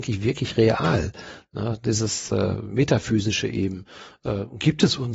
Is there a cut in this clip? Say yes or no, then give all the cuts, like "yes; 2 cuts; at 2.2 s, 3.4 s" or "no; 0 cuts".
no; 0 cuts